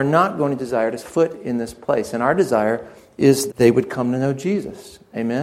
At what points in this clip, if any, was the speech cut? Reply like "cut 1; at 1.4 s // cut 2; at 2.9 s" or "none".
cut 1; at 1.0 s // cut 2; at 3.5 s